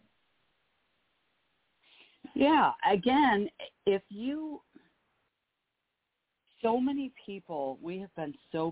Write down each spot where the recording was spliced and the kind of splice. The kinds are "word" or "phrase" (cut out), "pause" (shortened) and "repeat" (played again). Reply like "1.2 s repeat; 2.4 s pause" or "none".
none